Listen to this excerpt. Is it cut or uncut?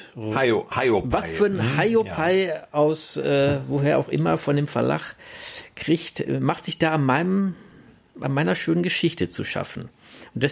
uncut